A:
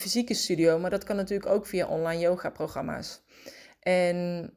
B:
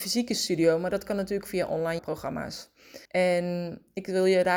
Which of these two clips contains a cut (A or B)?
B